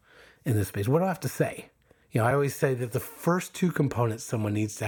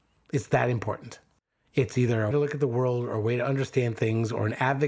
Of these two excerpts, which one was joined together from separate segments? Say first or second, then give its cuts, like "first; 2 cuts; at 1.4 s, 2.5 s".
second; 1 cut; at 2.3 s